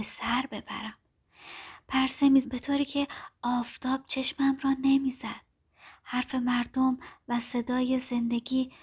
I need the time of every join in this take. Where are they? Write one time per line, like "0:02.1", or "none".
0:02.4